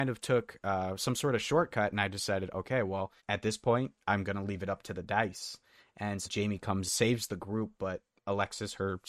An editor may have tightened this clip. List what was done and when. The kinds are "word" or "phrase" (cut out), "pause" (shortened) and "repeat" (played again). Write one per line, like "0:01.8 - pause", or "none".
0:03.2 - pause
0:06.2 - word
0:06.8 - word
0:08.1 - word